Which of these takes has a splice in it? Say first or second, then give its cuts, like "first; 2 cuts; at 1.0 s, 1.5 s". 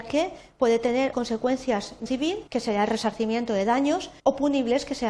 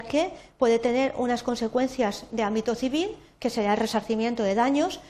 first; 4 cuts; at 1.1 s, 2.1 s, 2.5 s, 4.2 s